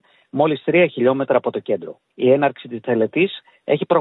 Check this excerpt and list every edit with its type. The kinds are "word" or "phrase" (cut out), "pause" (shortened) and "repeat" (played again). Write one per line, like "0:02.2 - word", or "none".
0:02.1 - pause